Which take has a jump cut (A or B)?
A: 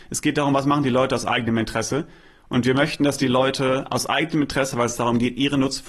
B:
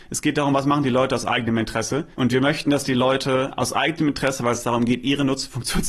B